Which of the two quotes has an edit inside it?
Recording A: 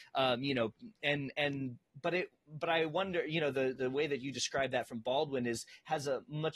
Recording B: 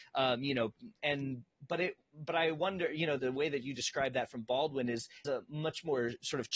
B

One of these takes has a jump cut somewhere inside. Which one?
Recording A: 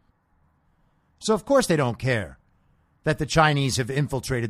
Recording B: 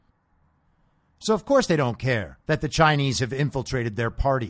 B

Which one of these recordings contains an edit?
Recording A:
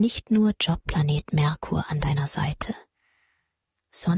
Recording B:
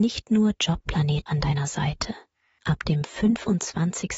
B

